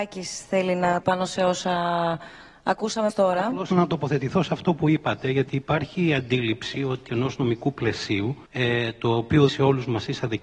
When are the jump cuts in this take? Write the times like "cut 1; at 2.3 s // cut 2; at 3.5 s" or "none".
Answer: cut 1; at 1.0 s // cut 2; at 3.1 s // cut 3; at 3.7 s // cut 4; at 7.1 s // cut 5; at 8.5 s // cut 6; at 9.5 s

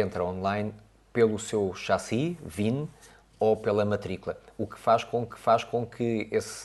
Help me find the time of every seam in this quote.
cut 1; at 5.3 s

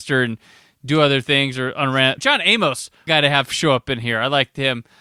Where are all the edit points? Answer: cut 1; at 2.2 s // cut 2; at 3.1 s

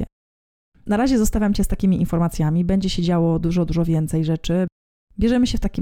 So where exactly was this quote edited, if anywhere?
none

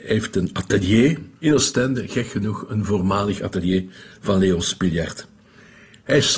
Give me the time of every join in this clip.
cut 1; at 1.4 s

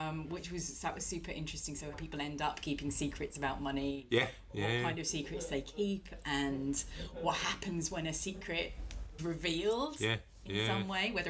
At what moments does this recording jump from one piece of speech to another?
cut 1; at 1.9 s // cut 2; at 9.2 s

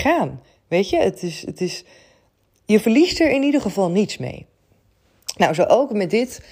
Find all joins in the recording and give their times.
none

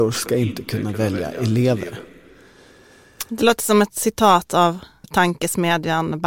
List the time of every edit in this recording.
cut 1; at 5.0 s

